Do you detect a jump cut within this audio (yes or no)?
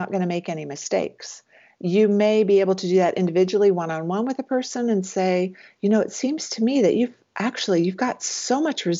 no